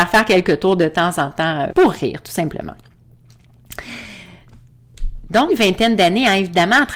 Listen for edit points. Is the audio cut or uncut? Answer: cut